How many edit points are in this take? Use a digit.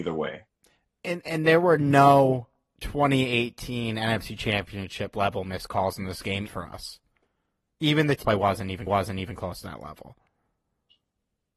3